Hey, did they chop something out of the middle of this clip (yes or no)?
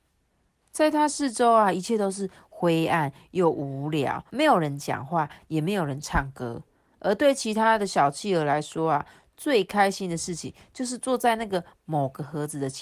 yes